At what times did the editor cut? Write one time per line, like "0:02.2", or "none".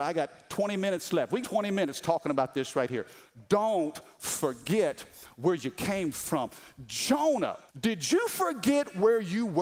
0:01.4
0:07.7